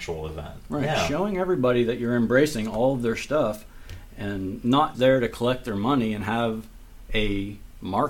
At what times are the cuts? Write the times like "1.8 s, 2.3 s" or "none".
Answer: 4.9 s